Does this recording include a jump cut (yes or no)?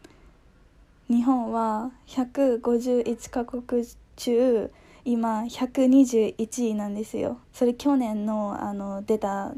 yes